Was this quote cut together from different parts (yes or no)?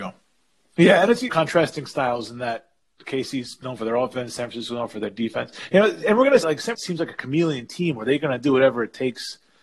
yes